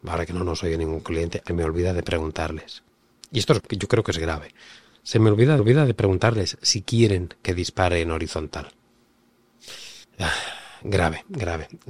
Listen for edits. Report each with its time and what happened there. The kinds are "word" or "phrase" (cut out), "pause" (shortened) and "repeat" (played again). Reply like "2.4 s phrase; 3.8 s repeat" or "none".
1.5 s phrase; 3.6 s word; 5.6 s repeat; 10.0 s pause